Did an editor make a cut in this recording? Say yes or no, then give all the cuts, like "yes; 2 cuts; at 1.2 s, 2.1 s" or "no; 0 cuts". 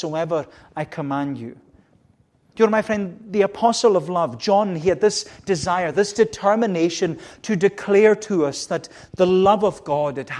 no; 0 cuts